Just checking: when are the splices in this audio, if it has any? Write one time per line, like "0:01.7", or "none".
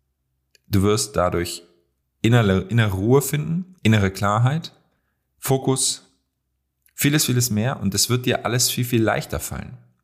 0:02.0
0:03.8
0:05.0